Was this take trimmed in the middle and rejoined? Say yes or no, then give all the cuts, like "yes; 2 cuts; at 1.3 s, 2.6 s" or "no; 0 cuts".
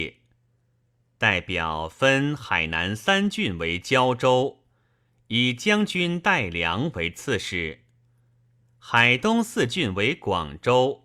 no; 0 cuts